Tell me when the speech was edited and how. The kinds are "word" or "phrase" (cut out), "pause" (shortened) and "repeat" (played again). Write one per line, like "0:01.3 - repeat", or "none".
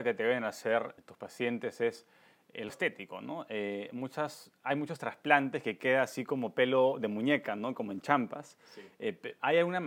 0:01.0 - word
0:02.7 - word